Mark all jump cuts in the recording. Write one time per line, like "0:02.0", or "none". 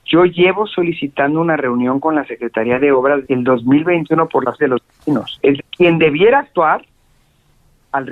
0:03.2
0:04.6
0:05.6